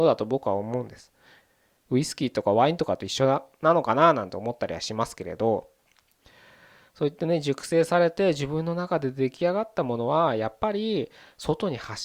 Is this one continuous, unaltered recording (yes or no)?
yes